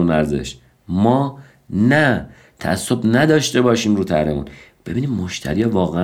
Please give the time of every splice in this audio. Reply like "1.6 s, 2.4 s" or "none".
none

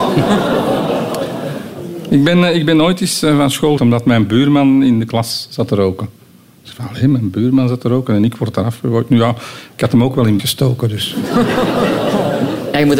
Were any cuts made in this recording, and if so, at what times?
3.8 s, 10.4 s

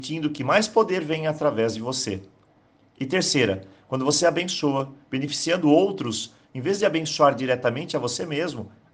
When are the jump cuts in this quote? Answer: none

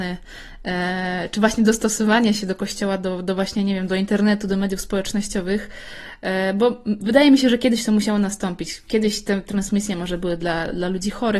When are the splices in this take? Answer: none

